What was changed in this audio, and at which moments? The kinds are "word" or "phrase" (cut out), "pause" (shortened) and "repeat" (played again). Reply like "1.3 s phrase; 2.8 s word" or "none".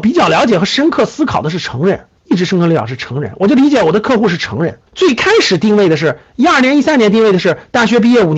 2.2 s pause; 4.9 s pause